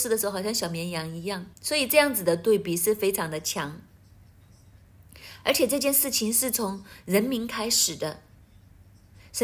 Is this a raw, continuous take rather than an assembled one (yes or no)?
no